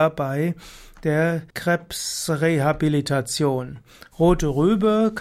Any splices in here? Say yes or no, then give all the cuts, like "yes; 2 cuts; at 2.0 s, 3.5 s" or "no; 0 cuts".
yes; 1 cut; at 1.5 s